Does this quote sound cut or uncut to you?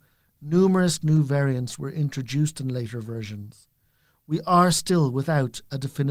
uncut